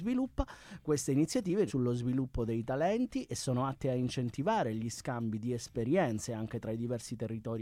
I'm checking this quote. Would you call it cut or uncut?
cut